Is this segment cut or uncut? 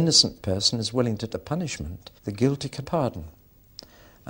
cut